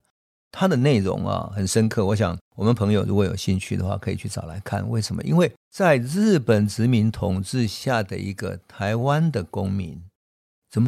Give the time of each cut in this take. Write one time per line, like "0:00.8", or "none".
0:02.5
0:05.6